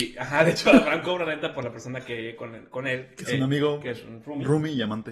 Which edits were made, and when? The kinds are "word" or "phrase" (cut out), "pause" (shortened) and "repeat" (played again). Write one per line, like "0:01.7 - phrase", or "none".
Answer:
none